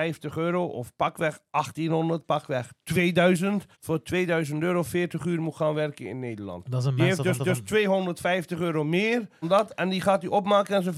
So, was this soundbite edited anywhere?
yes; 3 cuts; at 3.7 s, 7.4 s, 9.4 s

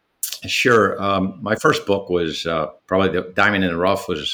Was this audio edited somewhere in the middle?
yes; 1 cut; at 2.8 s

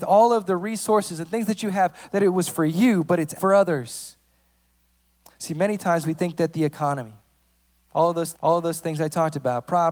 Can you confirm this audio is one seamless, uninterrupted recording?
no; 2 cuts; at 3.4 s, 8.3 s

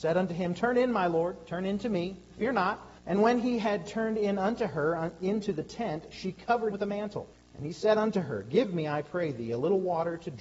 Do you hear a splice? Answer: yes; 3 cuts; at 3.0 s, 6.7 s, 7.3 s

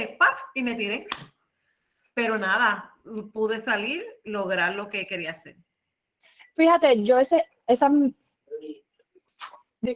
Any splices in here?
no; 0 cuts

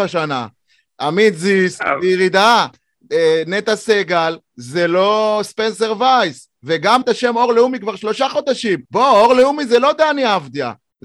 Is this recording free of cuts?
no; 2 cuts; at 7.0 s, 8.8 s

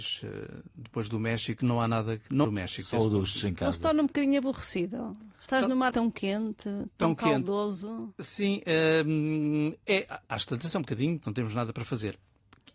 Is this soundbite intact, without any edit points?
no; 4 cuts; at 2.4 s, 5.3 s, 5.9 s, 11.2 s

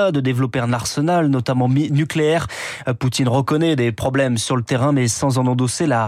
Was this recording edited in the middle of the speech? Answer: no; 0 cuts

